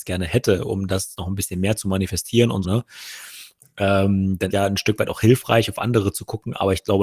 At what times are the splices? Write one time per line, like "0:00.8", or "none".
0:02.6
0:04.5

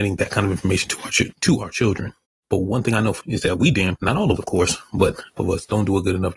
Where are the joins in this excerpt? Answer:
0:01.3
0:02.2
0:03.2
0:04.0
0:04.4
0:05.4

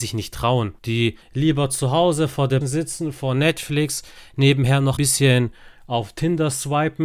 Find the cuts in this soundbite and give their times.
0:01.2
0:02.6
0:05.0

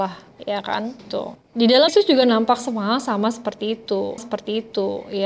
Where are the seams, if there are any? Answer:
0:01.0
0:01.4
0:01.9
0:04.2

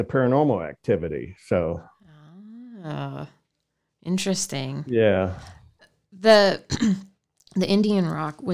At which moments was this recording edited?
none

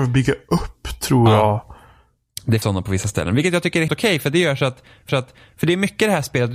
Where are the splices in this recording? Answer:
0:02.6
0:03.9
0:05.1

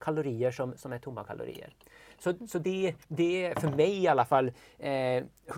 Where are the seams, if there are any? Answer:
0:03.0

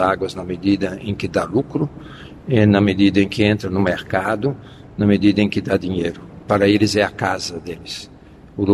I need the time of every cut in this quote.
none

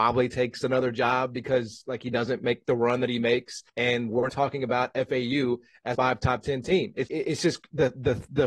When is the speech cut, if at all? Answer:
0:03.7
0:04.3
0:05.9
0:07.1

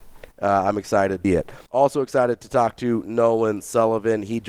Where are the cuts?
0:01.2
0:01.7

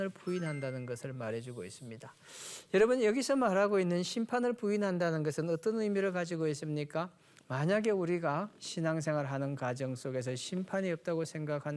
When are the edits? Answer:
none

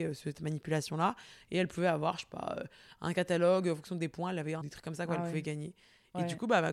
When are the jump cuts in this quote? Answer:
0:04.6

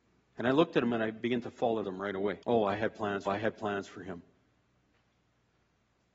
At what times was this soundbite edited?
0:01.8
0:02.4
0:03.3

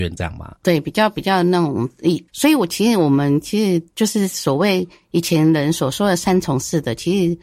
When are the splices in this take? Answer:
0:02.3

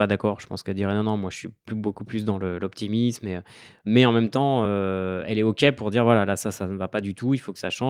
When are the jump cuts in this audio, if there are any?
none

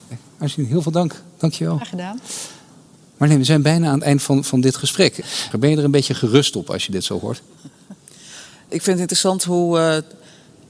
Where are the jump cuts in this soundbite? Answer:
none

